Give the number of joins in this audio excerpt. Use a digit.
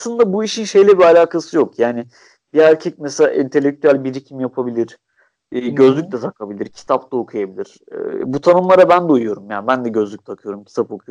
0